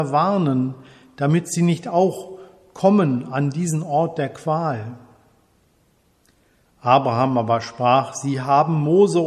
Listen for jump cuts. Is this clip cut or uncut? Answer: uncut